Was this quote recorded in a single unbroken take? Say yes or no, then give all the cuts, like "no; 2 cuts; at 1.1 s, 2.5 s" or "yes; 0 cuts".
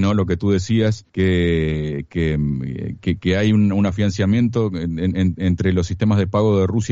no; 1 cut; at 1.1 s